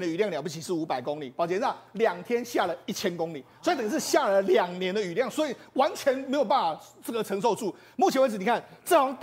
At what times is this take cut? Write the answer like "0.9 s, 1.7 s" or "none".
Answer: none